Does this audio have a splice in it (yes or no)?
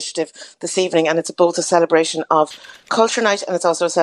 no